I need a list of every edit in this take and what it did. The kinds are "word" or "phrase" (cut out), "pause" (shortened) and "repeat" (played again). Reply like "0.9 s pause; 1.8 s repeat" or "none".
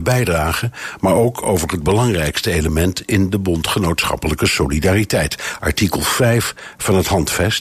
none